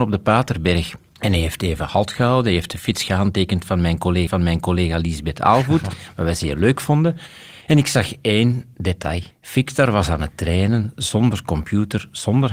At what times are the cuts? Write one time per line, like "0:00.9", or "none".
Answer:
0:04.3
0:07.6
0:09.3

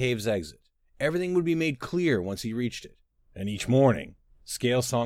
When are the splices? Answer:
none

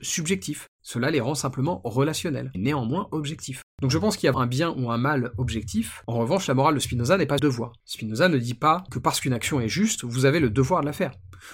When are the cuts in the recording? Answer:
0:02.5
0:04.3
0:07.4

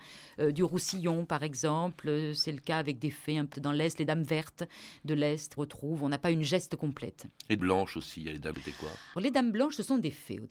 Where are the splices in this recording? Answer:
0:03.5
0:05.6
0:07.6
0:08.5
0:09.2

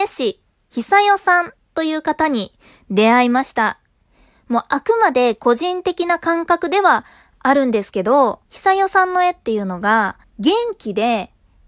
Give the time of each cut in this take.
0:08.4
0:10.2

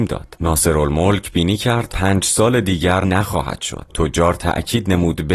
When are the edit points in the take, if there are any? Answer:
0:01.3
0:01.9
0:03.0
0:03.9

